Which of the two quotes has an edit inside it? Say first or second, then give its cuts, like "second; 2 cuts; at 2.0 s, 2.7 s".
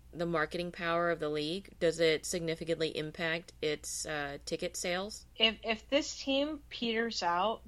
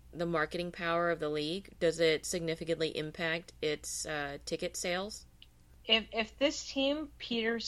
first; 1 cut; at 5.3 s